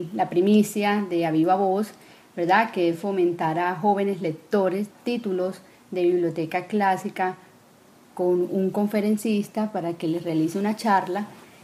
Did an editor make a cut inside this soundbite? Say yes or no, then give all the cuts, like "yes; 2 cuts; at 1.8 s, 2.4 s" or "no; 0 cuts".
yes; 1 cut; at 4.9 s